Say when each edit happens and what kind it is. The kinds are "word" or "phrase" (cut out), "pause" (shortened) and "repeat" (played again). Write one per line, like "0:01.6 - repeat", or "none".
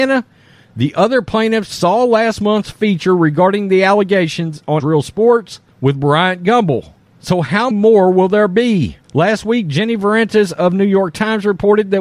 0:04.8 - word
0:05.7 - pause
0:07.1 - pause
0:07.7 - word
0:09.0 - pause